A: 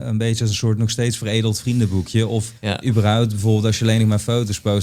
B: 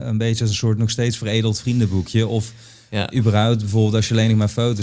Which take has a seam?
A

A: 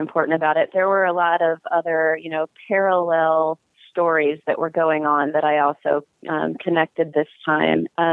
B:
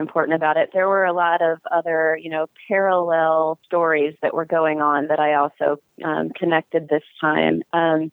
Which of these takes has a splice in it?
B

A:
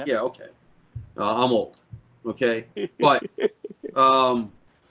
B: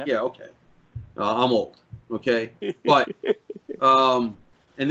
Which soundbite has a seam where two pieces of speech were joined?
B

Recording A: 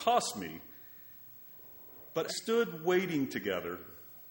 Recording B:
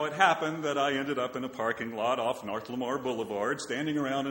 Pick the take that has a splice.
A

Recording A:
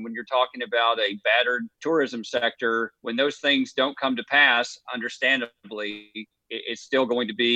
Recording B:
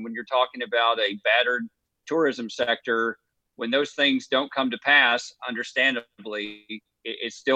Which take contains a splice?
A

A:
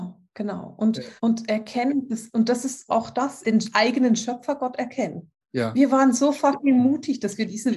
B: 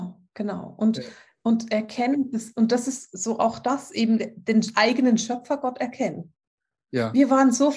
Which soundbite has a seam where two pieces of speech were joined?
A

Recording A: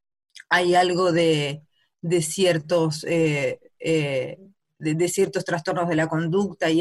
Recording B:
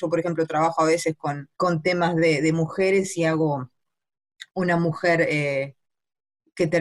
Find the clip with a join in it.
B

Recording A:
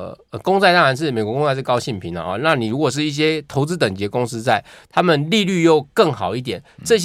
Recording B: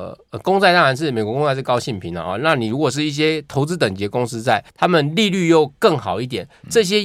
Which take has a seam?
B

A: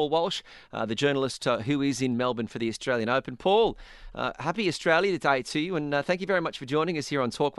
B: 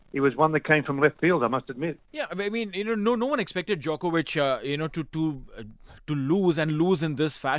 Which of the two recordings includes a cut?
B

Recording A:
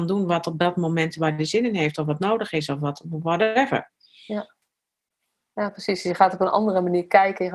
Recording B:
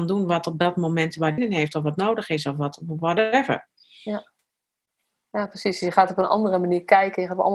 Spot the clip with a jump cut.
B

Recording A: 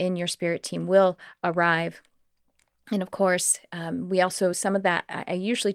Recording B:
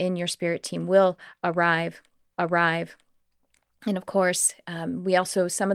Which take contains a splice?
B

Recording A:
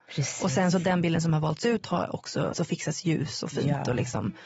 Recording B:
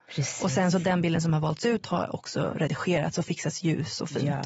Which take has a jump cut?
A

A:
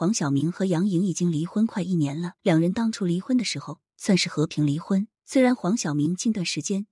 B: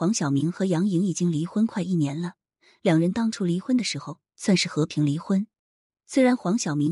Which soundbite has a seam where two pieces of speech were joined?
A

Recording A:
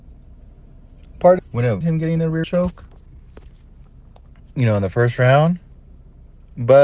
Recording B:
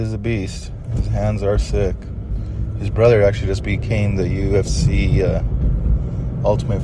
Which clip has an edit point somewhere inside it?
A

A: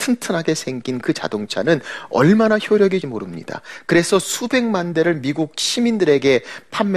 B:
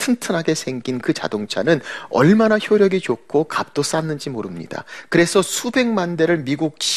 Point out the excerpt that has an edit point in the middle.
A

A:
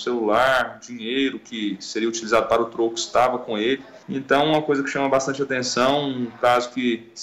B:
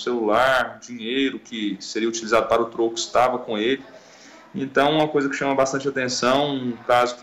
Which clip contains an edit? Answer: A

